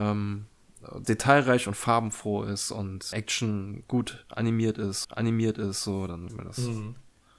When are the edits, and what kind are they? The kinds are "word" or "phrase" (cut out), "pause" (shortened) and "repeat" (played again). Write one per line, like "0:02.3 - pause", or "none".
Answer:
0:01.0 - phrase
0:03.1 - word
0:05.0 - repeat
0:06.3 - word